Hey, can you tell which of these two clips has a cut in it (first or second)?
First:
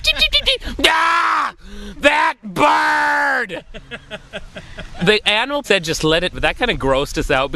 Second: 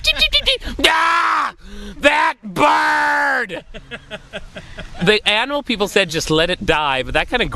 first